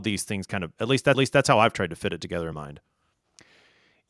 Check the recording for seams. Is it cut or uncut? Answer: cut